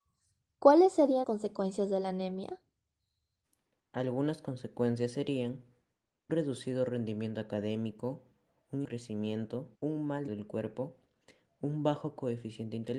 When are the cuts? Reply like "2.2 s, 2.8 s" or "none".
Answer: 1.2 s, 3.4 s, 6.3 s, 8.8 s, 9.7 s, 10.3 s